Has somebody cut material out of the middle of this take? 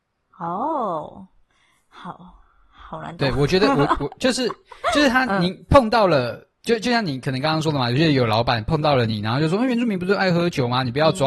yes; 1 cut; at 6.6 s

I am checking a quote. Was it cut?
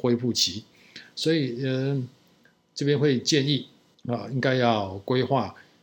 no; 0 cuts

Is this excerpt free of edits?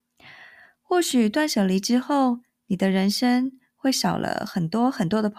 yes; 0 cuts

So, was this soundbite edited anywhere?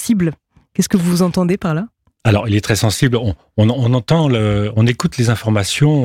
no; 0 cuts

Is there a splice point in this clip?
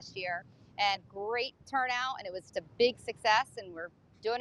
yes; 2 cuts; at 1.0 s, 2.5 s

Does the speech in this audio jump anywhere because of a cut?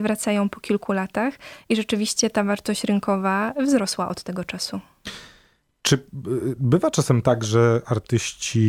no; 0 cuts

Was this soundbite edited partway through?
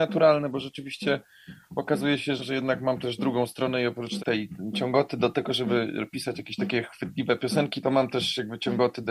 yes; 3 cuts; at 2.4 s, 4.2 s, 7.8 s

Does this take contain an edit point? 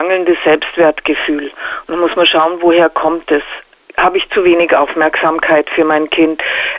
no; 0 cuts

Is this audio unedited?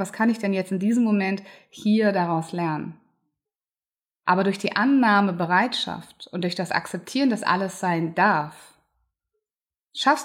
no; 1 cut; at 3.4 s

